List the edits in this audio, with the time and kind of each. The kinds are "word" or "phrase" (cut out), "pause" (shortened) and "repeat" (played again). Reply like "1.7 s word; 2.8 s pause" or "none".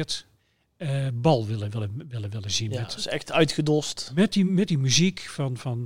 none